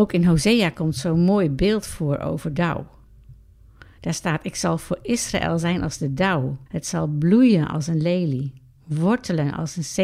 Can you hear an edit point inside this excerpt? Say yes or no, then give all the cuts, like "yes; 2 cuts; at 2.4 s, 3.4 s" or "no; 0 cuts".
yes; 2 cuts; at 2.5 s, 6.7 s